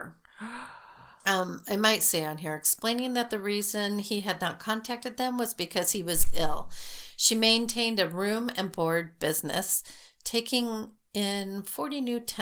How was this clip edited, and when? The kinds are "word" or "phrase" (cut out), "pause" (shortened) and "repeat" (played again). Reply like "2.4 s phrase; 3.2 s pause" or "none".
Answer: none